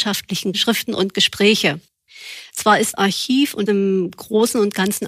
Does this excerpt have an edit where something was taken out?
yes; 2 cuts; at 2.9 s, 3.7 s

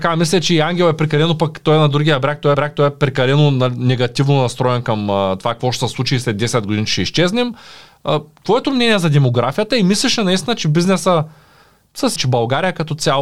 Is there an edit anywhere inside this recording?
yes; 3 cuts; at 2.5 s, 8.6 s, 12.2 s

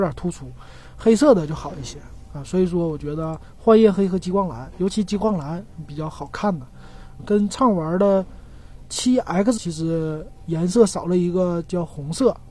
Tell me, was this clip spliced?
yes; 2 cuts; at 7.2 s, 9.6 s

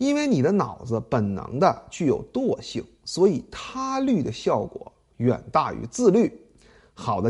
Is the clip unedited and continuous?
yes; 0 cuts

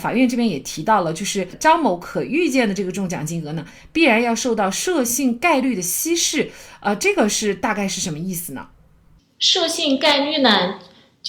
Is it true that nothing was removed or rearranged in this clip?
yes; 0 cuts

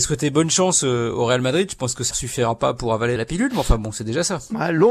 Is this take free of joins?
no; 2 cuts; at 2.1 s, 3.2 s

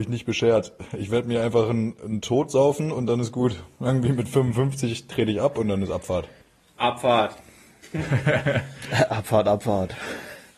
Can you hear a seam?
no; 0 cuts

